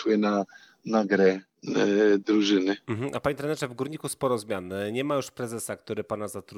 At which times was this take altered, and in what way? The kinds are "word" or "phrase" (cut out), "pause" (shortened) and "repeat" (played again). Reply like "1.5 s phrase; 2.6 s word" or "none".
none